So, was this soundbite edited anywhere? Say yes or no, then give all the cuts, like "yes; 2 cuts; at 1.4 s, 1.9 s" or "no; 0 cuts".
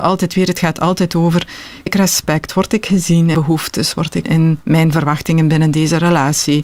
yes; 3 cuts; at 1.9 s, 3.3 s, 4.2 s